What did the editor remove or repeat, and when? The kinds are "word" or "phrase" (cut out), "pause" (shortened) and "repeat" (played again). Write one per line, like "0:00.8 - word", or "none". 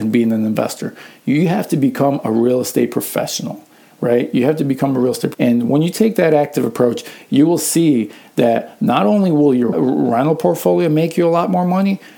0:05.3 - word
0:09.7 - phrase